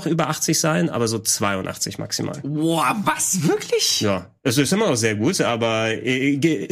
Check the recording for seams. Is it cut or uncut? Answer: uncut